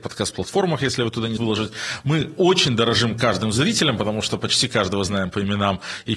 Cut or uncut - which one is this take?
cut